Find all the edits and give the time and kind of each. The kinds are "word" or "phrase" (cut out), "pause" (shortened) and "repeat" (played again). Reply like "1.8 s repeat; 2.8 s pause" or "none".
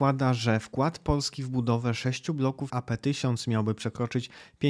2.7 s word